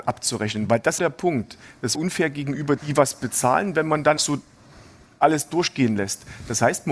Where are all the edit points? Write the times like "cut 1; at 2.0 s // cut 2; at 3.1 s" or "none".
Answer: cut 1; at 1.0 s // cut 2; at 1.9 s // cut 3; at 2.8 s // cut 4; at 4.2 s